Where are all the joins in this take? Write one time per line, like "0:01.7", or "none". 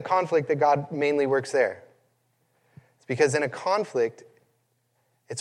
none